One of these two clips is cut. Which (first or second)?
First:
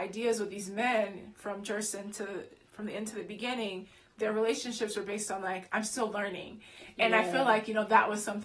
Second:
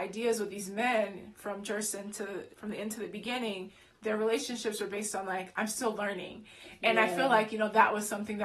second